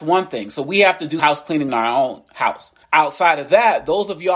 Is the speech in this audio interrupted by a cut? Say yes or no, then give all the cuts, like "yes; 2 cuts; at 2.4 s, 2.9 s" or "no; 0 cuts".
yes; 3 cuts; at 1.2 s, 1.7 s, 2.8 s